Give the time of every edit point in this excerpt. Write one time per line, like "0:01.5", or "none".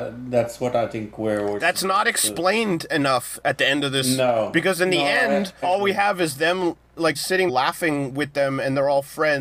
0:05.6
0:07.1
0:07.5